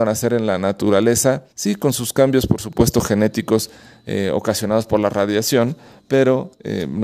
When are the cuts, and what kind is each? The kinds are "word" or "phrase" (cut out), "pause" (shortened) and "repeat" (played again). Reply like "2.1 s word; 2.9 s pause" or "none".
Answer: 1.5 s pause